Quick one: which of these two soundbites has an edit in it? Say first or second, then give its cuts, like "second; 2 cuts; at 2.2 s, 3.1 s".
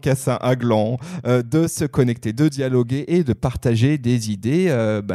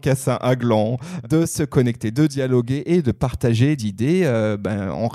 second; 2 cuts; at 1.2 s, 3.8 s